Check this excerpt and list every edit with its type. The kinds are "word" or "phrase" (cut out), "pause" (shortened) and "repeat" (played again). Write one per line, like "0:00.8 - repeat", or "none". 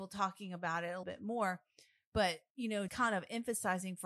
0:01.0 - word
0:02.9 - word